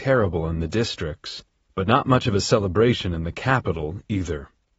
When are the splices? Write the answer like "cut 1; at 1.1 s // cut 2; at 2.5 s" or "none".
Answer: cut 1; at 1.7 s